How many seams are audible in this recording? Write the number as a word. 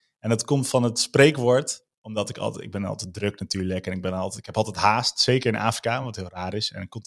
zero